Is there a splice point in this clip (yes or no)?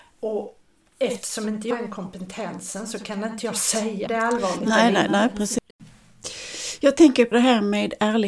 yes